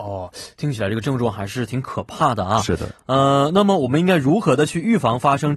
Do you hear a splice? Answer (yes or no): no